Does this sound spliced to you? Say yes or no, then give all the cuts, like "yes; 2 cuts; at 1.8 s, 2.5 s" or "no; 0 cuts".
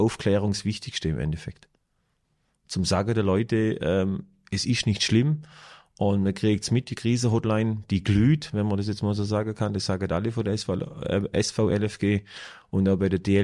no; 0 cuts